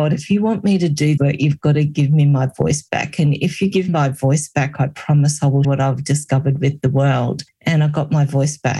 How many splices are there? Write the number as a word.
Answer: three